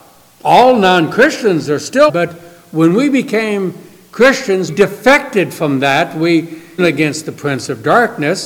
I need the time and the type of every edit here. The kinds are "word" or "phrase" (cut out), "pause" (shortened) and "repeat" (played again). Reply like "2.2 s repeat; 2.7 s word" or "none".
2.1 s phrase; 4.7 s word; 6.8 s phrase